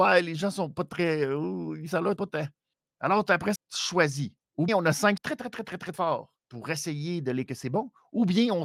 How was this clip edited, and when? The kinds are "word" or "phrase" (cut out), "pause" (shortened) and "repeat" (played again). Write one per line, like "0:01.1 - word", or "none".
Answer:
0:02.2 - word
0:02.7 - pause
0:03.6 - word
0:04.7 - word
0:05.2 - phrase
0:05.9 - word
0:06.4 - pause
0:07.5 - word